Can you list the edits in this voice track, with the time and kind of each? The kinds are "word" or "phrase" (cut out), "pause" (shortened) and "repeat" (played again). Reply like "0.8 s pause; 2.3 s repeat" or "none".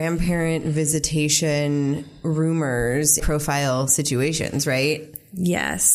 3.2 s phrase